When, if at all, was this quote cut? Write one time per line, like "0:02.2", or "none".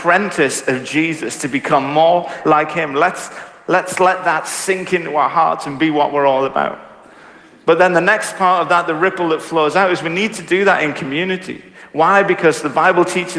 none

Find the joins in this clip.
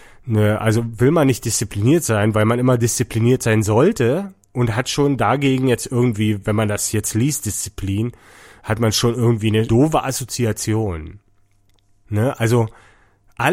none

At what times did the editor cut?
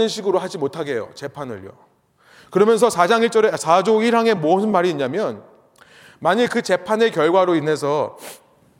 none

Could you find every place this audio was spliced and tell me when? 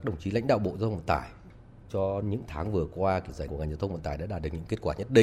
0:02.2
0:03.5

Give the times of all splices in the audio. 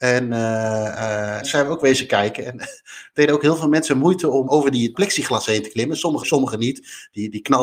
0:01.4
0:04.5
0:04.9
0:06.2

